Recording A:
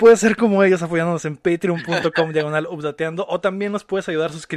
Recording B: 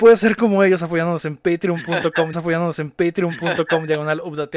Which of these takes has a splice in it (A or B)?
B